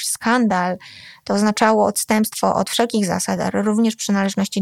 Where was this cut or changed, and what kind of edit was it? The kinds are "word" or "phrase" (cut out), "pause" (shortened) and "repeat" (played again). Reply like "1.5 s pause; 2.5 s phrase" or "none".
none